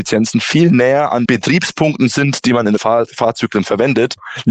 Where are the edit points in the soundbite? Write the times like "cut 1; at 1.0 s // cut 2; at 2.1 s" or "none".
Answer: cut 1; at 1.3 s // cut 2; at 2.8 s